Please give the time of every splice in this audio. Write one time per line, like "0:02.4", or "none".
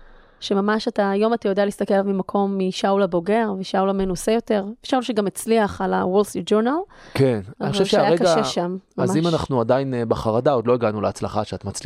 none